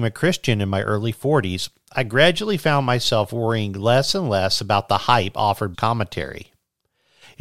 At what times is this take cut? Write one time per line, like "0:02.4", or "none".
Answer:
0:05.7